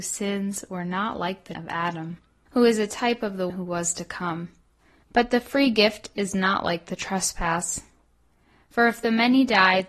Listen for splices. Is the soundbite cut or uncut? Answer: cut